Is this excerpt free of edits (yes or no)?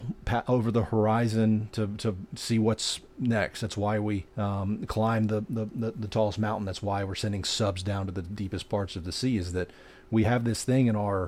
no